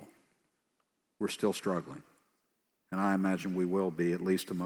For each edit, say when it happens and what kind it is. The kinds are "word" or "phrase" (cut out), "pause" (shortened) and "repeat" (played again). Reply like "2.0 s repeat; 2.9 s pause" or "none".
none

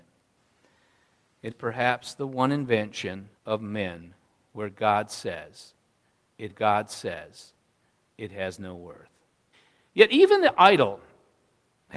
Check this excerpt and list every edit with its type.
1.5 s word; 3.4 s pause; 6.5 s repeat; 9.5 s pause

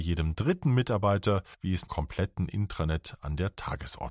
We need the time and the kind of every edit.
1.5 s pause; 1.9 s word

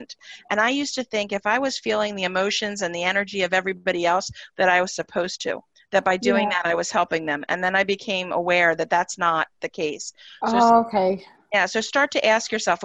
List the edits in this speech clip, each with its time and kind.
none

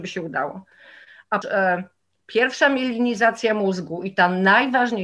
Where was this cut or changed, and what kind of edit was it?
1.4 s word

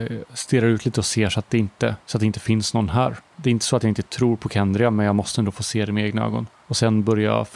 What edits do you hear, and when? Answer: 2.0 s pause

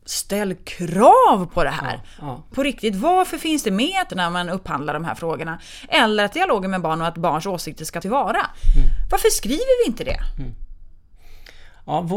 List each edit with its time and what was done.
2.5 s word; 3.6 s word; 4.1 s phrase; 6.3 s phrase; 8.0 s word

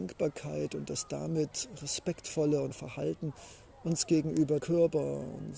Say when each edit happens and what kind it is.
2.7 s word; 4.6 s word

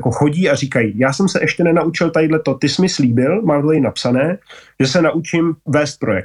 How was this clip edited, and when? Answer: none

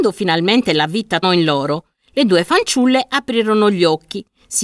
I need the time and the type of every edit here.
1.2 s word

